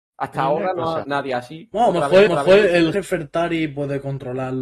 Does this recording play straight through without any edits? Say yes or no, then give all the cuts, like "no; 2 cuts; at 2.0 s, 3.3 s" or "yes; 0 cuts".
no; 3 cuts; at 1.0 s, 2.3 s, 2.9 s